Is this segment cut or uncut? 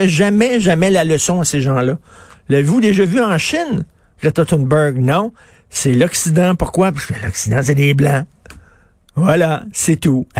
uncut